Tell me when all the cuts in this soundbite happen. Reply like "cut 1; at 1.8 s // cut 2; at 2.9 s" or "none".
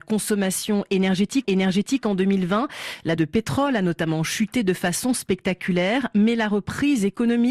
cut 1; at 1.4 s // cut 2; at 3.2 s